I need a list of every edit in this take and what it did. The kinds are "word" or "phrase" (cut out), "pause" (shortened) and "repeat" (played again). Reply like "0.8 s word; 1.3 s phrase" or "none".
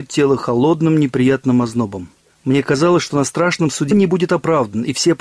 3.9 s word